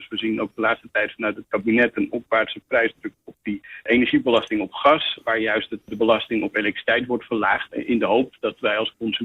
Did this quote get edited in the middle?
no; 0 cuts

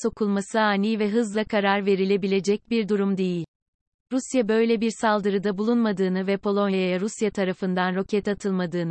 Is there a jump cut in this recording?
no; 0 cuts

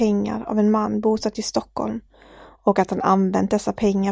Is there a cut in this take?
no; 0 cuts

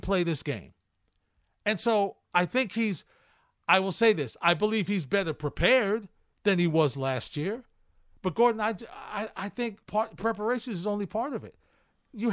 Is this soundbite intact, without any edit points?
no; 1 cut; at 9.8 s

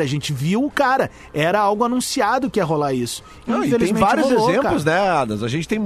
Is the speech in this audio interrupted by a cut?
no; 0 cuts

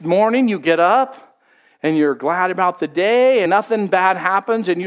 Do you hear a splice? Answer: yes; 1 cut; at 3.5 s

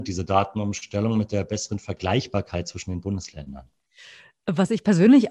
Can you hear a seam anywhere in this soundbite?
no; 0 cuts

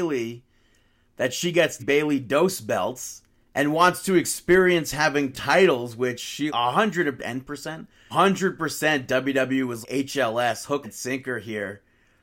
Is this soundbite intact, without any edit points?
no; 8 cuts; at 1.8 s, 3.4 s, 5.3 s, 6.5 s, 7.2 s, 8.1 s, 9.8 s, 10.8 s

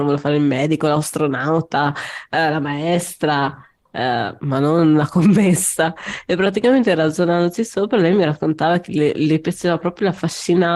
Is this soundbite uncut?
yes; 0 cuts

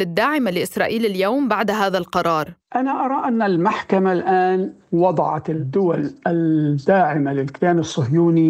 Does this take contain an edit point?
yes; 1 cut; at 2.6 s

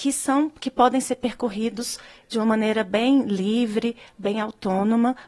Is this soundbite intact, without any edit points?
yes; 0 cuts

